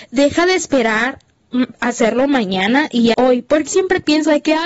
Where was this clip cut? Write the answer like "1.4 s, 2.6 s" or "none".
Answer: 1.7 s, 3.1 s, 3.7 s